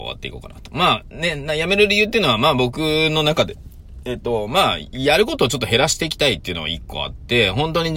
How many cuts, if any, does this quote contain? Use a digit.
0